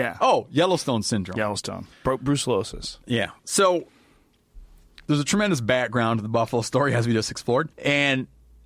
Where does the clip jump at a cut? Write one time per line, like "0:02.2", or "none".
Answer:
0:01.9
0:03.4
0:07.7

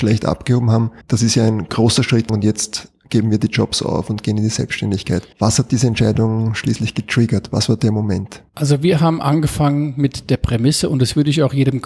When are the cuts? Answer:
0:01.0
0:02.3
0:05.3
0:08.5

